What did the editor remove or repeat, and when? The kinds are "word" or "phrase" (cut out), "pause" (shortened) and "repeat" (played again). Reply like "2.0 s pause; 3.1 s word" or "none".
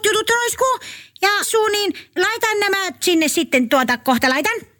1.4 s word; 2.2 s word; 3.0 s word